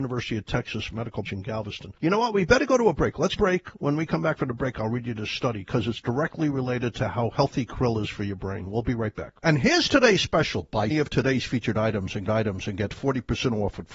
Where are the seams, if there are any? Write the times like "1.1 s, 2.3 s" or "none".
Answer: 1.3 s, 2.0 s, 3.4 s, 9.4 s, 10.9 s, 12.2 s